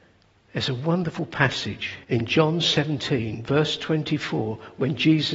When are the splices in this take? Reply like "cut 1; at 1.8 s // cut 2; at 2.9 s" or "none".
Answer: cut 1; at 2.0 s